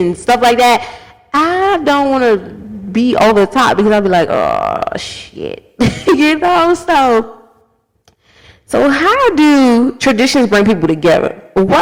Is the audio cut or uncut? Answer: uncut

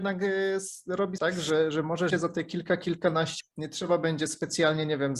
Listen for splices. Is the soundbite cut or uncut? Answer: cut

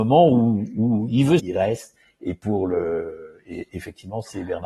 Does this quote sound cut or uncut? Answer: cut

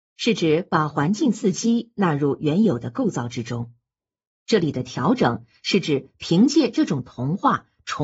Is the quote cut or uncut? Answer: uncut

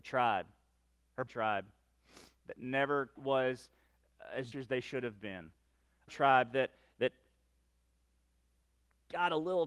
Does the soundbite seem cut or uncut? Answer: cut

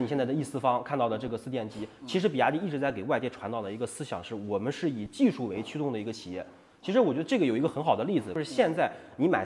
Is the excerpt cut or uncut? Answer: uncut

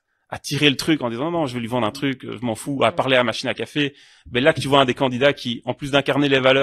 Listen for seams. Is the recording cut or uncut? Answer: uncut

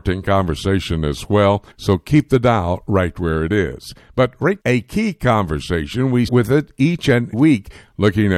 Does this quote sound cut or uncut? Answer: cut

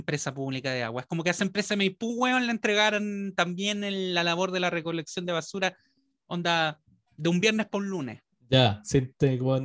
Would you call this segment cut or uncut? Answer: uncut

